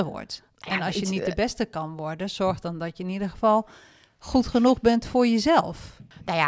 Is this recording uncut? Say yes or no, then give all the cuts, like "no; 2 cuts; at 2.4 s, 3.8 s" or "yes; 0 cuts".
yes; 0 cuts